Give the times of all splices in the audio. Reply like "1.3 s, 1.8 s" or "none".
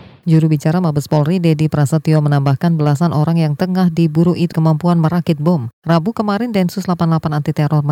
4.5 s